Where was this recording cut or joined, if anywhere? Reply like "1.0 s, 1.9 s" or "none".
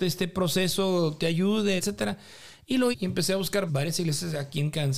1.8 s, 2.9 s, 3.7 s